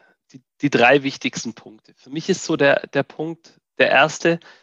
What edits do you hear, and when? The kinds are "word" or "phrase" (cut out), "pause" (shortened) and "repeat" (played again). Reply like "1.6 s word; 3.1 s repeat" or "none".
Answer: none